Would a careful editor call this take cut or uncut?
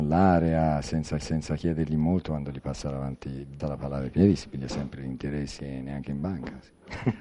cut